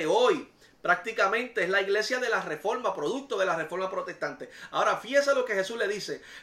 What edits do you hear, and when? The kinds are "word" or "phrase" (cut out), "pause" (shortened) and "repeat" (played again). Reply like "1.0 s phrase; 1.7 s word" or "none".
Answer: none